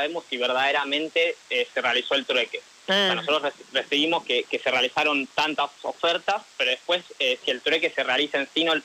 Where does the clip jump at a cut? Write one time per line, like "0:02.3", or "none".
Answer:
0:06.5